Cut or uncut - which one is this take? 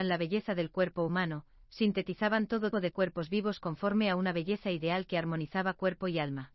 cut